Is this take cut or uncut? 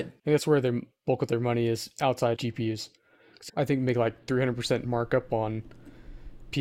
cut